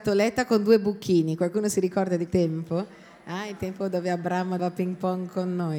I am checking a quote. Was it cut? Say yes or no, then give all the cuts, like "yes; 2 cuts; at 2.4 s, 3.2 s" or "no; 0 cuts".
yes; 2 cuts; at 2.3 s, 4.6 s